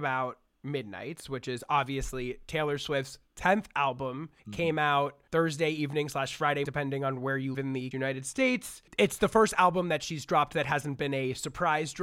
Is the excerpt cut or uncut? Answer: cut